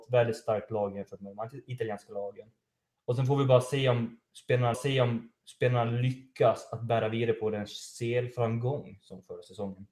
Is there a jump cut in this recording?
yes; 1 cut; at 4.7 s

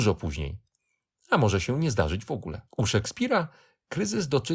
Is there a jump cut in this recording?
yes; 1 cut; at 2.7 s

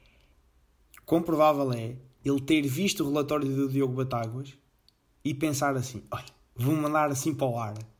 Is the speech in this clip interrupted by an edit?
no; 0 cuts

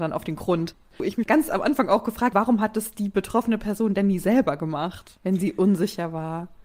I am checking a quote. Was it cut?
yes; 1 cut; at 2.3 s

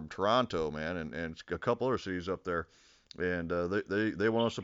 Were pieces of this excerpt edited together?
no; 0 cuts

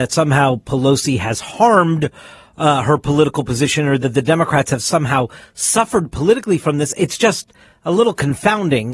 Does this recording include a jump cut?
no; 0 cuts

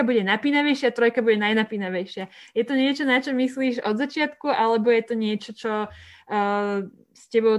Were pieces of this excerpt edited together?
no; 0 cuts

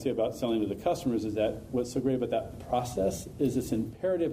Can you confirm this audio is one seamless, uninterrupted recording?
yes; 0 cuts

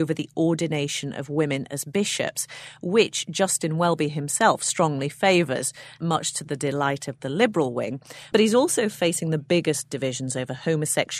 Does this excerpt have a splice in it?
no; 0 cuts

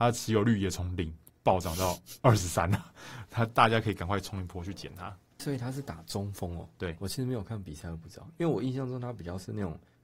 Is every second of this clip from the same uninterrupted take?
no; 1 cut; at 5.4 s

